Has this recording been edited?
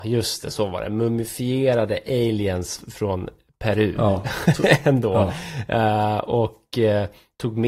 no; 0 cuts

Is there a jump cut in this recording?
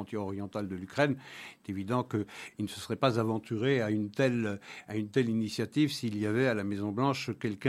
no; 0 cuts

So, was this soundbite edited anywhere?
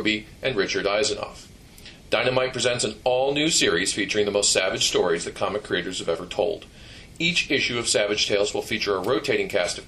no; 0 cuts

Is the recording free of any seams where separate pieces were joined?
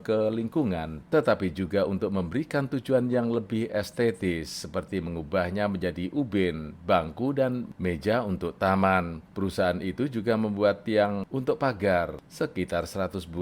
no; 1 cut; at 9.2 s

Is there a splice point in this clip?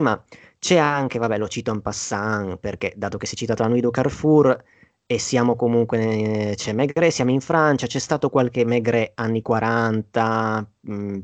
no; 0 cuts

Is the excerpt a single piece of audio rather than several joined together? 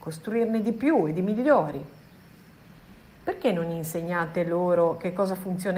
yes; 0 cuts

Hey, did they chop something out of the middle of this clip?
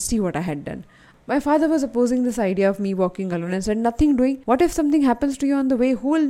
no; 0 cuts

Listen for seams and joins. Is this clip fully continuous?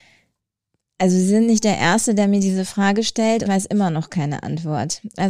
no; 1 cut; at 3.5 s

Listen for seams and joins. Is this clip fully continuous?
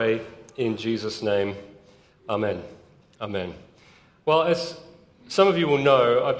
yes; 0 cuts

